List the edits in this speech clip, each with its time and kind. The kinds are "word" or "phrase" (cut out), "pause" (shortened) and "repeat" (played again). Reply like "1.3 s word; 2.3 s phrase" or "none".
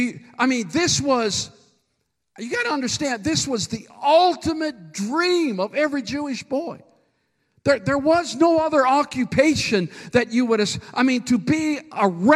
none